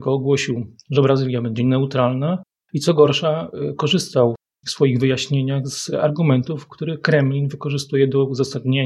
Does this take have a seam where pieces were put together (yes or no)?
no